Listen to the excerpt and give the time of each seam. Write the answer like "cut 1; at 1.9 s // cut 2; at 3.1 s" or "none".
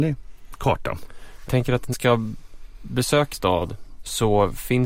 cut 1; at 1.5 s // cut 2; at 1.9 s // cut 3; at 3.3 s